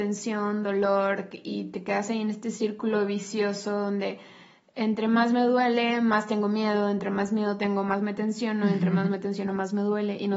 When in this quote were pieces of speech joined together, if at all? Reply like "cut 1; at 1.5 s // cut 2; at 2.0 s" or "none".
none